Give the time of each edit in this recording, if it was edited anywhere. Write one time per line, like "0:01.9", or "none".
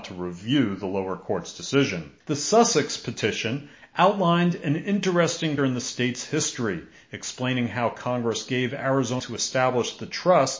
0:02.2
0:05.6
0:09.2